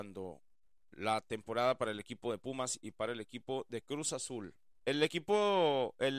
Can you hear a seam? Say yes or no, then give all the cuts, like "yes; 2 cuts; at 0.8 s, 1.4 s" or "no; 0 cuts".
no; 0 cuts